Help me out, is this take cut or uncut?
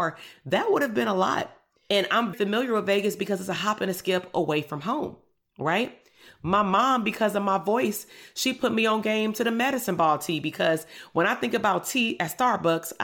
cut